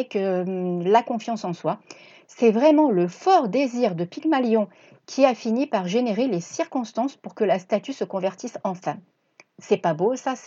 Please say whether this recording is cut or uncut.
uncut